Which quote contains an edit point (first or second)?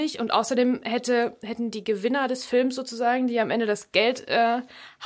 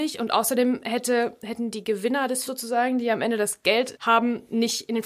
second